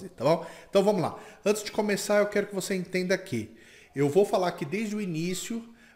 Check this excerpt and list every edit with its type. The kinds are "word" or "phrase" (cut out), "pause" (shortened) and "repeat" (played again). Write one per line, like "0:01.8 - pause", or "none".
none